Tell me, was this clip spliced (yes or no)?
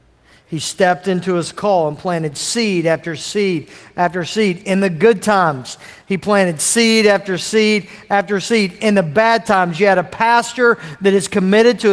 no